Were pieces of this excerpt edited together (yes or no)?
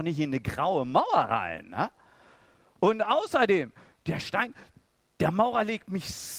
no